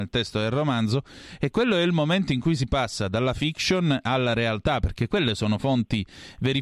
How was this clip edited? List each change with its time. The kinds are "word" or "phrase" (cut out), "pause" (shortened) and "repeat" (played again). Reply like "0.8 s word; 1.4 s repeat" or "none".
none

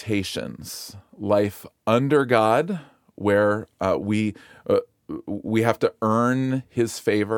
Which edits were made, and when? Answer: none

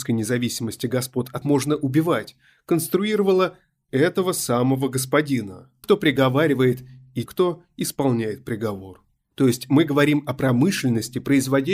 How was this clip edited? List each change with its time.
1.4 s phrase; 5.8 s phrase; 7.3 s word

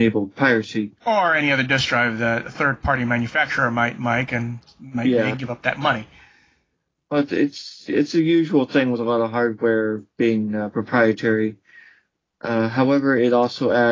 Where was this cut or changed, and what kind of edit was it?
5.3 s phrase

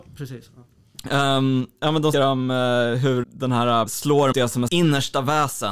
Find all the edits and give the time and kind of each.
2.1 s word; 3.2 s word; 3.9 s word; 4.3 s word; 4.7 s word

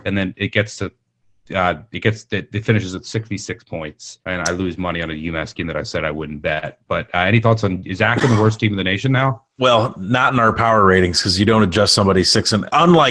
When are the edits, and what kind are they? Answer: 4.2 s pause

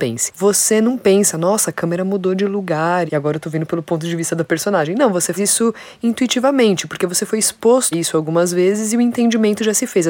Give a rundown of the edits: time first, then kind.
3.1 s word; 5.4 s word; 7.9 s word

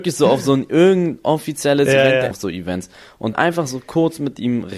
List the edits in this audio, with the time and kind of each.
2.3 s phrase; 3.3 s word

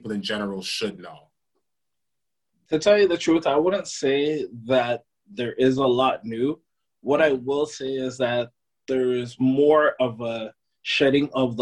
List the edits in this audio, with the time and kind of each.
none

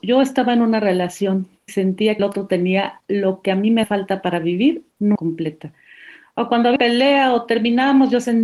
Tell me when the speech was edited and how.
1.7 s word; 2.2 s word; 3.8 s word; 5.2 s word; 6.8 s word

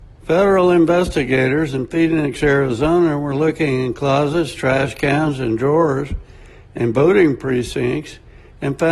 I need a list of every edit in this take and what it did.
none

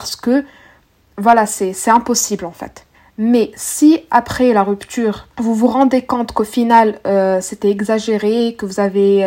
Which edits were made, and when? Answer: 2.9 s pause; 5.3 s pause

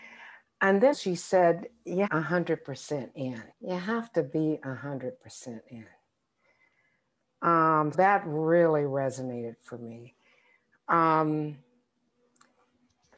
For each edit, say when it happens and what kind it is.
0.9 s word; 2.1 s phrase; 3.5 s pause; 7.9 s word

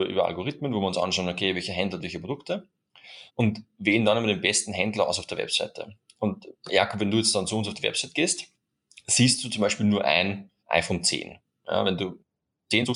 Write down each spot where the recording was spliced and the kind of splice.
3.3 s pause; 10.6 s pause

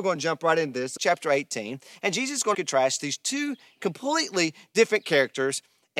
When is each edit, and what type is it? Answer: 1.0 s word; 2.5 s phrase

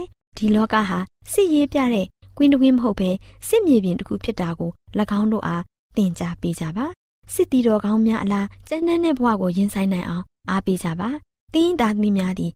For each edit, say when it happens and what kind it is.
none

